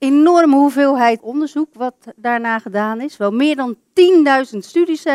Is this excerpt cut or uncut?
cut